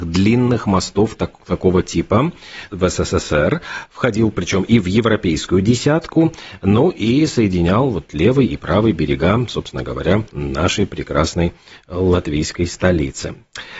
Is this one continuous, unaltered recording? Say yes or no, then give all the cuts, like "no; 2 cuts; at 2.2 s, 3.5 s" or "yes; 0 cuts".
no; 2 cuts; at 2.7 s, 10.3 s